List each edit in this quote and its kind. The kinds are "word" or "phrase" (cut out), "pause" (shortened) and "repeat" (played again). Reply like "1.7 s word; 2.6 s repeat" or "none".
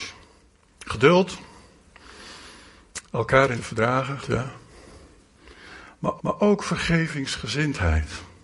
3.0 s pause; 3.6 s word; 4.2 s word; 6.2 s repeat